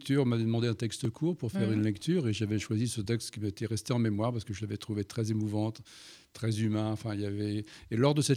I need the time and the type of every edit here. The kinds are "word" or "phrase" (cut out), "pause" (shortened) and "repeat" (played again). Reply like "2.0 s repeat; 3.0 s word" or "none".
none